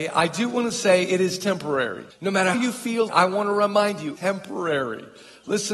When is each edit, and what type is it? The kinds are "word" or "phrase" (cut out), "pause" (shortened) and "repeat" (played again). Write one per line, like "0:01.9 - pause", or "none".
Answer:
0:02.1 - pause
0:02.5 - word
0:03.1 - word
0:04.2 - word